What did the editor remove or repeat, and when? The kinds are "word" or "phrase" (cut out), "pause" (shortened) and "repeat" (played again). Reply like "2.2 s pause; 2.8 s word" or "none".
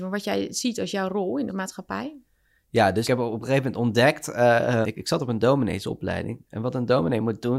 1.5 s word; 3.0 s word; 4.8 s word